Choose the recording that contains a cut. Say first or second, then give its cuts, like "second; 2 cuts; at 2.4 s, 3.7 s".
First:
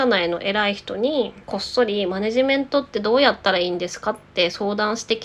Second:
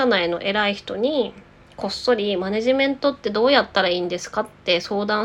first; 1 cut; at 1.4 s